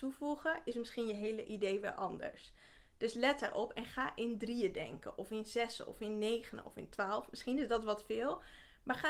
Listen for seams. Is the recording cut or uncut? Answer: uncut